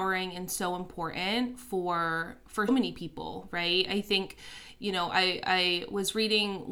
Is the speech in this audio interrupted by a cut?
yes; 1 cut; at 2.7 s

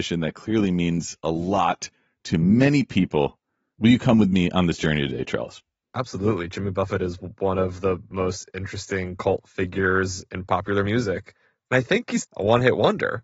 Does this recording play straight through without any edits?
no; 1 cut; at 12.2 s

